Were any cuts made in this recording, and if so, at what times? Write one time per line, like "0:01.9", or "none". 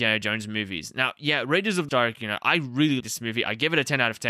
0:01.9
0:02.4
0:03.0